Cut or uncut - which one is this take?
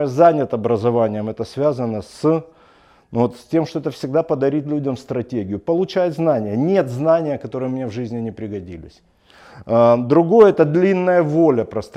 uncut